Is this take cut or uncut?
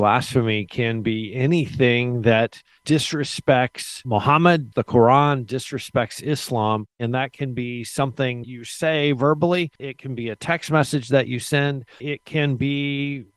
cut